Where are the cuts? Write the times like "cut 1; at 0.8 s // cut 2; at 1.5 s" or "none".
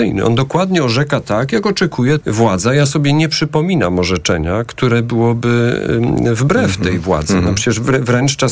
cut 1; at 2.2 s